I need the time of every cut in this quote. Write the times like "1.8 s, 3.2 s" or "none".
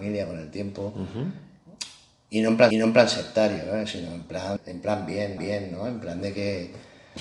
2.7 s, 4.6 s, 5.4 s

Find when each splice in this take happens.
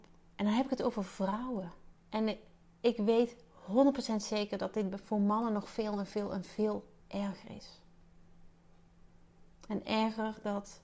2.0 s, 7.0 s

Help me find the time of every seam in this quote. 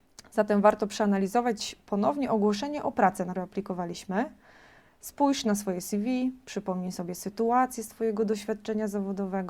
3.3 s

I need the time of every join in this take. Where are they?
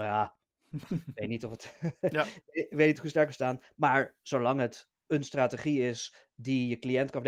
none

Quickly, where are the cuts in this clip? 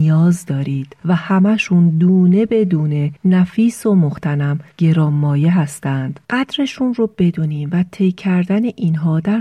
1.0 s, 3.2 s, 4.7 s, 6.2 s

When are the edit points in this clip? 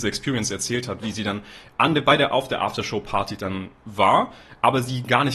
none

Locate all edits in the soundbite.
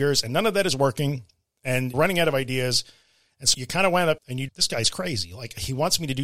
1.9 s, 3.5 s, 4.2 s, 4.5 s

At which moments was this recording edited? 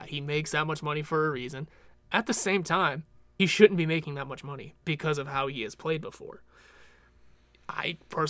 3.4 s

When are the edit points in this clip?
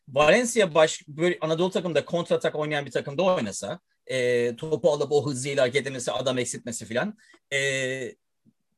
none

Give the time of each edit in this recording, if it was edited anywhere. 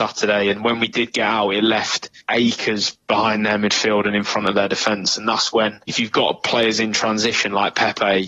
2.2 s, 5.8 s

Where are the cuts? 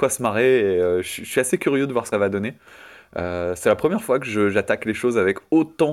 2.1 s

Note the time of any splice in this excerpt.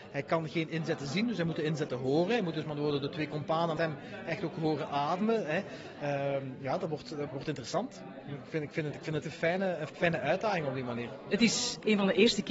3.8 s, 7.3 s, 9.2 s, 9.9 s

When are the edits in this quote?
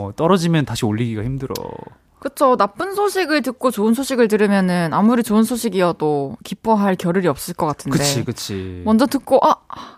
none

